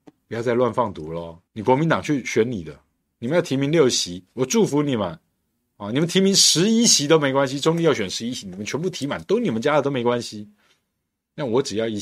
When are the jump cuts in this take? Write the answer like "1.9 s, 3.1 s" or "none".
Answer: 1.5 s